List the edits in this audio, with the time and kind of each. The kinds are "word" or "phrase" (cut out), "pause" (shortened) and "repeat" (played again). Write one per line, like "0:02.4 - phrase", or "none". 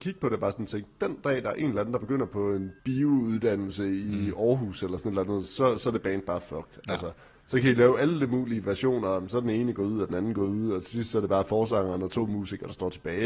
none